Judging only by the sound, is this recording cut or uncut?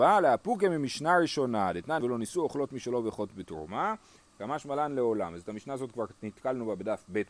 cut